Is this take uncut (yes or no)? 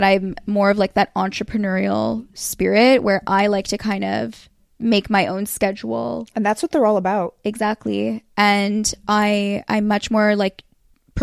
yes